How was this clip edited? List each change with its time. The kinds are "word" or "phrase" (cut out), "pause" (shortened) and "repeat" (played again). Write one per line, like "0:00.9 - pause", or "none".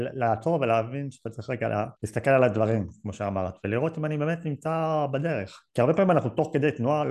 0:02.0 - pause
0:05.7 - pause